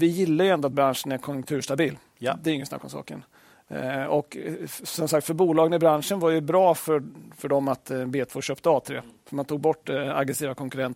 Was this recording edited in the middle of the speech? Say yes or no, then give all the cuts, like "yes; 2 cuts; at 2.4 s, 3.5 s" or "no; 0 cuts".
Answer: no; 0 cuts